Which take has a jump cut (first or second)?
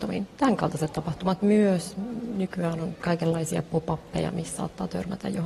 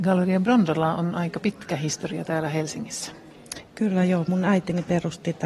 second